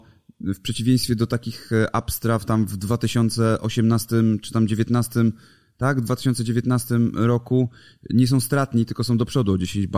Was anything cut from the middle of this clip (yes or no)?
no